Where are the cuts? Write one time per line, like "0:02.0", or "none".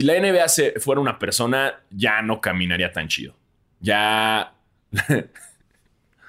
none